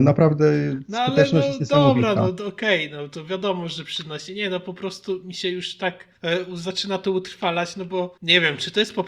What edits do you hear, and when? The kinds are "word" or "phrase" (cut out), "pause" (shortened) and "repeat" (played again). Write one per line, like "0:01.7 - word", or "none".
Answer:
0:06.2 - pause
0:08.2 - pause